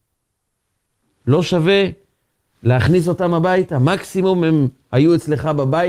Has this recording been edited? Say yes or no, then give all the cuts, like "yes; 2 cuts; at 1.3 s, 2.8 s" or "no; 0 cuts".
no; 0 cuts